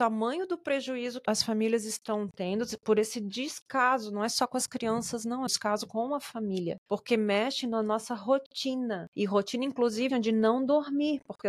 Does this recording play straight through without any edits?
no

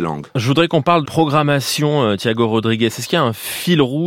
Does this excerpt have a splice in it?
yes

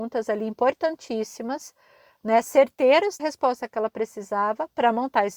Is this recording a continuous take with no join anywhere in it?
no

